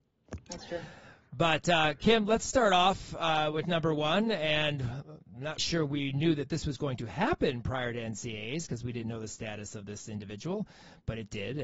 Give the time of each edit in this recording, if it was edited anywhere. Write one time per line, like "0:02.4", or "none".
0:05.6